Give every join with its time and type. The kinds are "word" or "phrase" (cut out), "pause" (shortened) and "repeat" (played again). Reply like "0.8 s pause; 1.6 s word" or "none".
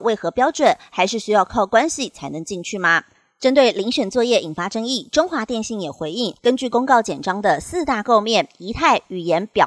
6.4 s pause

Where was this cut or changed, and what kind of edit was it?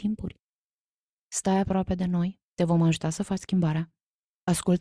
2.4 s pause

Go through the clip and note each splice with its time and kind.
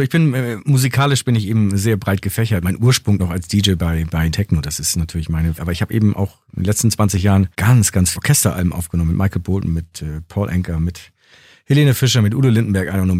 2.6 s phrase; 3.2 s word; 4.3 s phrase; 5.5 s word; 7.5 s pause; 8.1 s phrase

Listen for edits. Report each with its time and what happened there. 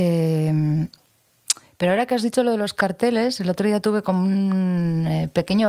none

